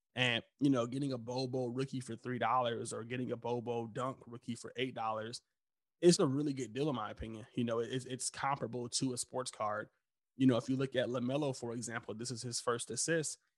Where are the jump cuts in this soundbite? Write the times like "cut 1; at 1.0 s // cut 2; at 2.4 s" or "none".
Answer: cut 1; at 6.2 s